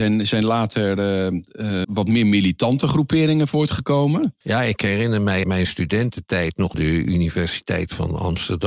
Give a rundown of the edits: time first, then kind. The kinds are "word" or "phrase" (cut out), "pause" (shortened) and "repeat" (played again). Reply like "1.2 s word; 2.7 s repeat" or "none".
1.8 s word; 4.4 s pause; 5.4 s word; 6.7 s phrase